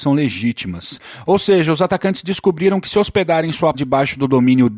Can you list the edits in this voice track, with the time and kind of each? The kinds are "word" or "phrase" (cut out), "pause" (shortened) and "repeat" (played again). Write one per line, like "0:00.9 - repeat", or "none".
0:03.7 - word